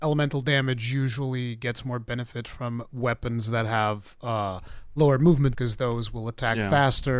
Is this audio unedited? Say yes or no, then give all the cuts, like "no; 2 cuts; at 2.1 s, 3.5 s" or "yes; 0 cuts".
no; 1 cut; at 5.5 s